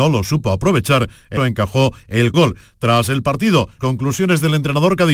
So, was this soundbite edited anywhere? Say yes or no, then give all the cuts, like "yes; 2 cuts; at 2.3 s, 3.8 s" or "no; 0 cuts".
yes; 3 cuts; at 1.4 s, 2.3 s, 3.8 s